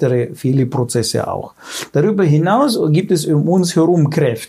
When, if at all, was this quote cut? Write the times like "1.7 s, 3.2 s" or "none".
none